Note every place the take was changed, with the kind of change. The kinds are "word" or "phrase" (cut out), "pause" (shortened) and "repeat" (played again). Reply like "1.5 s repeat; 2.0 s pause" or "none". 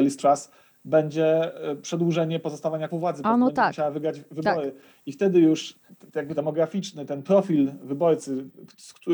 2.9 s word; 5.9 s word; 6.4 s phrase